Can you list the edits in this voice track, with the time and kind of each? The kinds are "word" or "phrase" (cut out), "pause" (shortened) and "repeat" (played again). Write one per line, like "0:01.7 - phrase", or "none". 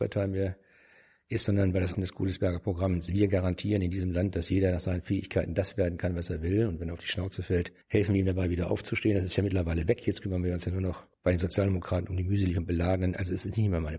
0:01.9 - word
0:07.8 - pause
0:11.1 - pause